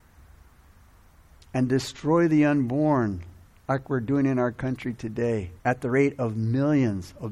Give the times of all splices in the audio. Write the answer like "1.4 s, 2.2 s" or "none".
3.5 s, 5.6 s